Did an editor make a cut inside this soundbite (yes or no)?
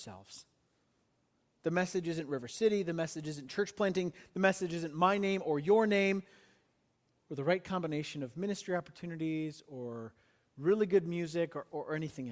no